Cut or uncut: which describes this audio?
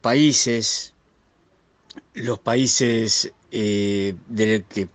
cut